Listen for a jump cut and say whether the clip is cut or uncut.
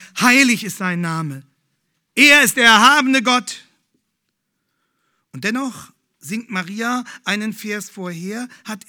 uncut